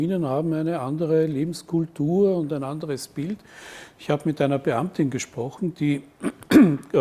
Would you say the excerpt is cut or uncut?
uncut